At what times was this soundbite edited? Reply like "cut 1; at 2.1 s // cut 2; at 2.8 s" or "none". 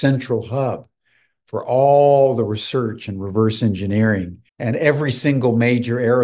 cut 1; at 4.5 s